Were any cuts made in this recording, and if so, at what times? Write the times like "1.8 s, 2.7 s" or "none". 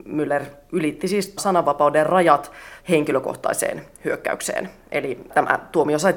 1.4 s, 2.8 s